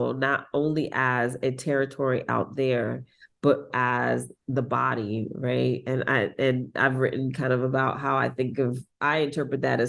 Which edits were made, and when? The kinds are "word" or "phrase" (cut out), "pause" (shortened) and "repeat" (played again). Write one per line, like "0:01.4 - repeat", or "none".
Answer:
0:03.7 - word